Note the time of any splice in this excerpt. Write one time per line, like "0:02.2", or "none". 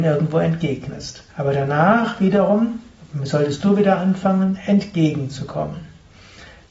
0:01.3